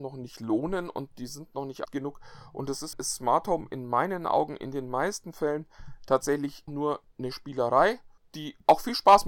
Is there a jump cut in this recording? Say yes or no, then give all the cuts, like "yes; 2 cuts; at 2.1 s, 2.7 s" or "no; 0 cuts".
yes; 3 cuts; at 1.8 s, 2.9 s, 6.7 s